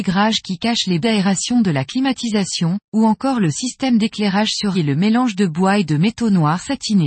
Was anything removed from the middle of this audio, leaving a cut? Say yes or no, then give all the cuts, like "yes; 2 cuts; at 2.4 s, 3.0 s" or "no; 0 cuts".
yes; 3 cuts; at 1.0 s, 2.8 s, 4.7 s